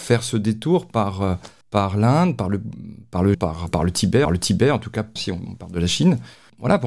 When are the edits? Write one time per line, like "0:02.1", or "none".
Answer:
0:01.6
0:03.3
0:03.7
0:04.3
0:05.2